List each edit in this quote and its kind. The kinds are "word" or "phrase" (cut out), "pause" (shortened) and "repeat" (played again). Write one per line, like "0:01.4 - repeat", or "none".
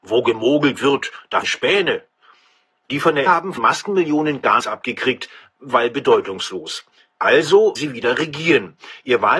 0:01.4 - word
0:03.3 - word
0:03.6 - word
0:04.6 - word
0:07.8 - word